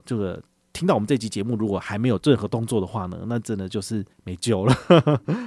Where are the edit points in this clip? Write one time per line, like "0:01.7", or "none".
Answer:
0:04.1

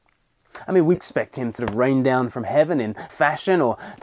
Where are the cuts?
0:00.9
0:01.6
0:02.3
0:03.1

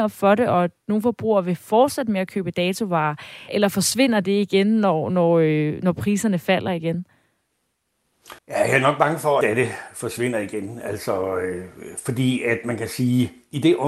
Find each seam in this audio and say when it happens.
0:03.5
0:08.4
0:09.4

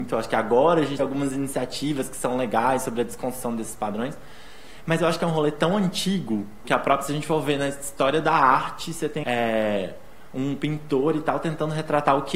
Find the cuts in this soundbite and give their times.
0:01.0
0:06.6
0:09.2

